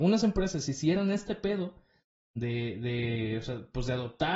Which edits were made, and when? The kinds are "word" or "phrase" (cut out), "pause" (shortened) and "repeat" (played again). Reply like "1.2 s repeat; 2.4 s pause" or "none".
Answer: none